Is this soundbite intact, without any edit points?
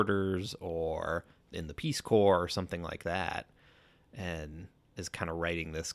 yes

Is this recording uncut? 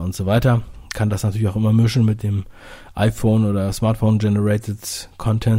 yes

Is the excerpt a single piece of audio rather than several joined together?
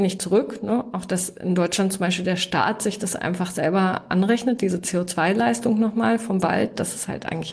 yes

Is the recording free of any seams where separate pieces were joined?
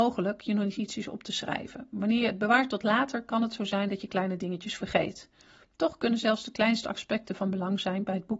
yes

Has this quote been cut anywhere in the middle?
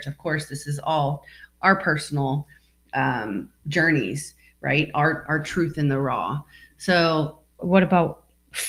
yes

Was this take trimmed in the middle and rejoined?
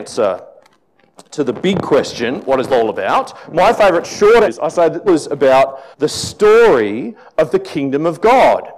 yes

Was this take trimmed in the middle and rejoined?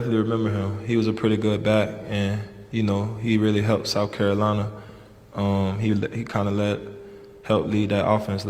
no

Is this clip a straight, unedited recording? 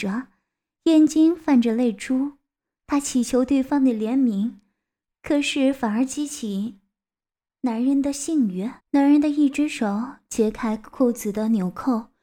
no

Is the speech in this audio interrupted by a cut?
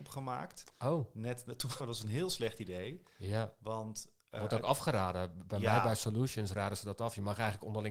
yes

